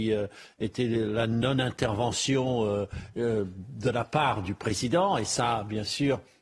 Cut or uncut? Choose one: uncut